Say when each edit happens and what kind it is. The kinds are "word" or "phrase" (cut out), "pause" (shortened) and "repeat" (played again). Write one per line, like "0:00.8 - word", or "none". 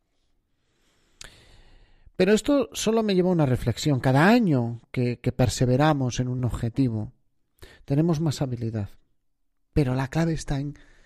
none